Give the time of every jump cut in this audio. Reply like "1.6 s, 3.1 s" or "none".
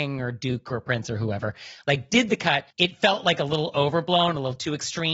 2.7 s